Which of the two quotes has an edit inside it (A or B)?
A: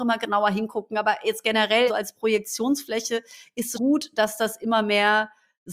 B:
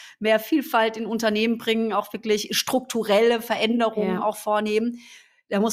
A